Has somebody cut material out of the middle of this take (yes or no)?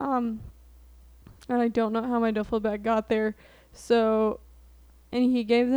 no